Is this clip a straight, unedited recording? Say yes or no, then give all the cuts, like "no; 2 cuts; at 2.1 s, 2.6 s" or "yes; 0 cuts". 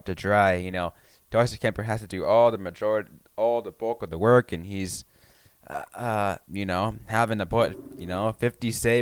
yes; 0 cuts